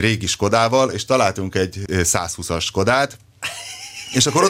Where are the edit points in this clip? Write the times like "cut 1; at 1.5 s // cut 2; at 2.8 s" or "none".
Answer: cut 1; at 1.9 s